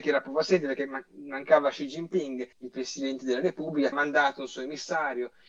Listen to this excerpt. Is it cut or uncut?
cut